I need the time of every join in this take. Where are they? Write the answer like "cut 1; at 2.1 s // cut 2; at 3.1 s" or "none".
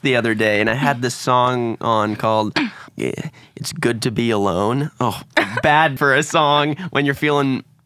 cut 1; at 2.9 s // cut 2; at 6.0 s